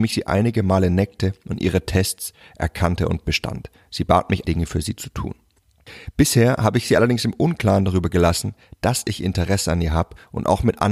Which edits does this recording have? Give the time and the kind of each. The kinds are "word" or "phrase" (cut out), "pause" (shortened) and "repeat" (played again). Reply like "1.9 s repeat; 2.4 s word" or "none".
4.4 s word